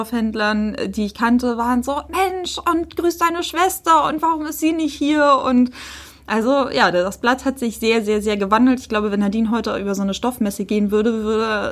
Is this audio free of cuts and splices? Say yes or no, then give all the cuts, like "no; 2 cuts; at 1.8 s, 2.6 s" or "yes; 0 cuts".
yes; 0 cuts